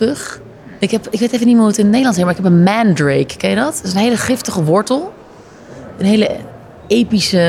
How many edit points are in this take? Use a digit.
0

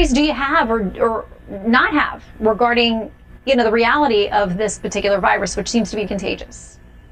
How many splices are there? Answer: 1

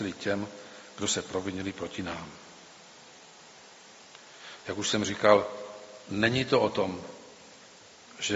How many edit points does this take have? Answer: 0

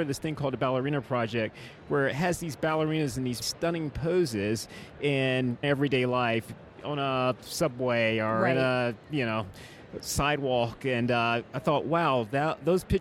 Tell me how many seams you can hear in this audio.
2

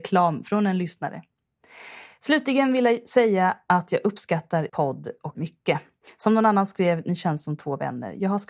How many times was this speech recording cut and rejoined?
2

